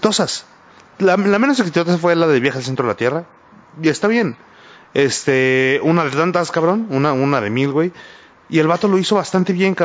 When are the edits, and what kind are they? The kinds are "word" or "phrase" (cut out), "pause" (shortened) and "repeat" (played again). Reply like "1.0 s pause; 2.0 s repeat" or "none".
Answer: none